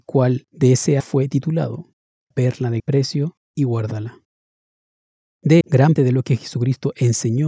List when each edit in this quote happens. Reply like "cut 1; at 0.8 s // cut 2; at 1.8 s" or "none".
cut 1; at 1.0 s // cut 2; at 2.3 s // cut 3; at 2.8 s // cut 4; at 3.4 s // cut 5; at 5.6 s // cut 6; at 6.0 s